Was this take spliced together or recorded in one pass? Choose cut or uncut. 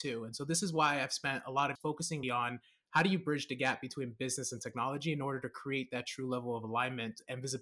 cut